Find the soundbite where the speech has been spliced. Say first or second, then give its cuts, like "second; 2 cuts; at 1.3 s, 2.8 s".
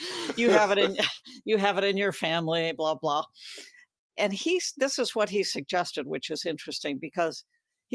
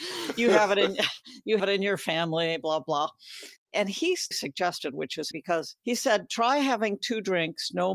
second; 5 cuts; at 1.6 s, 3.6 s, 4.3 s, 5.3 s, 5.8 s